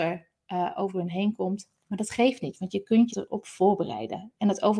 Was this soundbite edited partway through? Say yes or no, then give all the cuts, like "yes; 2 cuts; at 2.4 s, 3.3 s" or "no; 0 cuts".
yes; 1 cut; at 3.1 s